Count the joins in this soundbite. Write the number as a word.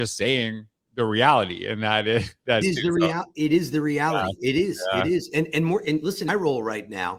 two